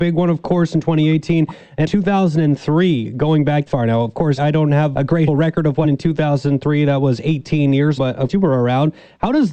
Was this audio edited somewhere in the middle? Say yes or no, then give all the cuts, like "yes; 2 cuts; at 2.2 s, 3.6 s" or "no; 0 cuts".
yes; 8 cuts; at 1.8 s, 3.7 s, 4.4 s, 4.9 s, 5.3 s, 5.8 s, 8.0 s, 8.3 s